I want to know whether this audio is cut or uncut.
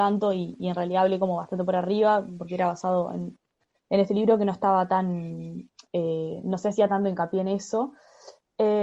uncut